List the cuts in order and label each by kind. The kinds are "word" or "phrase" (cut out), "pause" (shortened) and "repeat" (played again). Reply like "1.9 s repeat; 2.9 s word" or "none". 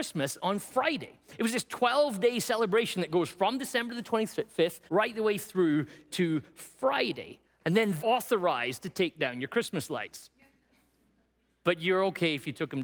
4.9 s pause; 7.4 s pause; 8.0 s phrase